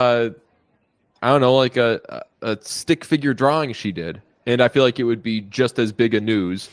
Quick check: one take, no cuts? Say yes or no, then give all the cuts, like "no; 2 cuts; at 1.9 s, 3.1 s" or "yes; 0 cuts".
yes; 0 cuts